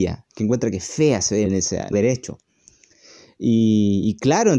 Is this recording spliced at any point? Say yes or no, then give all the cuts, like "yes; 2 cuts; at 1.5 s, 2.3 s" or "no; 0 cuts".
yes; 2 cuts; at 1.5 s, 1.9 s